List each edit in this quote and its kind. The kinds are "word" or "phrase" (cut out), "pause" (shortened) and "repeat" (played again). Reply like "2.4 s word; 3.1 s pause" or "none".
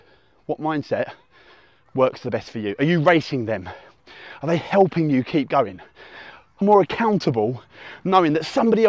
6.6 s phrase